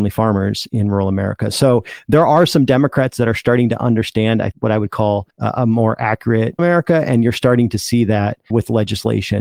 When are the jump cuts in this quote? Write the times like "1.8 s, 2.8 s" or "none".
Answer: 4.5 s, 5.3 s, 6.6 s, 8.5 s

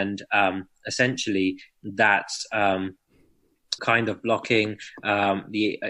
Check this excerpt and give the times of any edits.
3.8 s

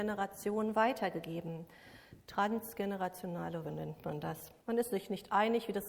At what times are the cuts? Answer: 3.6 s, 4.6 s

